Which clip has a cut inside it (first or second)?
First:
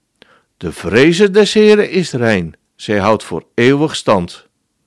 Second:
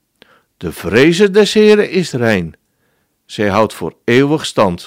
first